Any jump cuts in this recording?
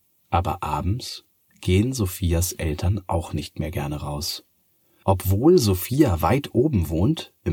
no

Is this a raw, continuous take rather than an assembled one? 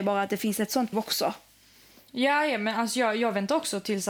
no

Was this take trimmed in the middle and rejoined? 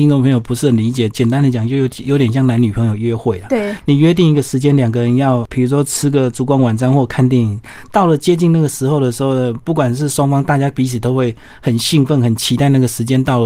no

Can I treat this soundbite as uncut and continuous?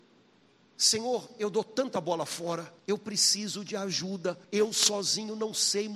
no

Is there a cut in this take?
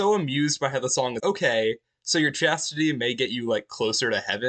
yes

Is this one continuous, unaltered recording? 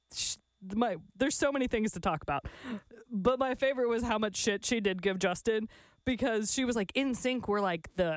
yes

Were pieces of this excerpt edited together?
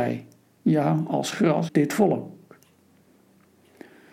yes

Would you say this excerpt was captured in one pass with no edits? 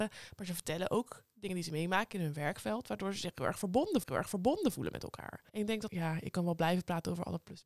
no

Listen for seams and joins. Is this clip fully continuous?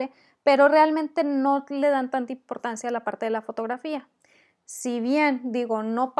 yes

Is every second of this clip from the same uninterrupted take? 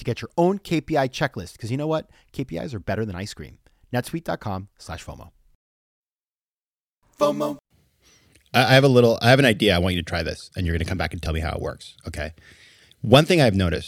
yes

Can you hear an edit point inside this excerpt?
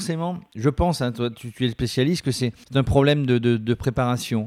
yes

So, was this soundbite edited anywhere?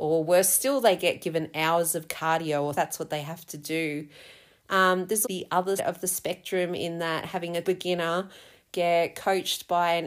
yes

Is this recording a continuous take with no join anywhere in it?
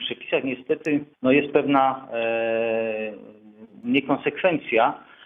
no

